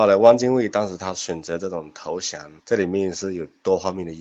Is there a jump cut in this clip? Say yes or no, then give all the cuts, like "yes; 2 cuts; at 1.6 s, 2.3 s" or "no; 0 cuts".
yes; 1 cut; at 2.6 s